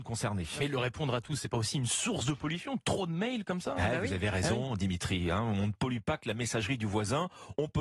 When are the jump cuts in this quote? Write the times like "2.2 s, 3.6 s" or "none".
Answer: none